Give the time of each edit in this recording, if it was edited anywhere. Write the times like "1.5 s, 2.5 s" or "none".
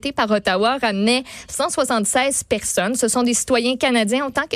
none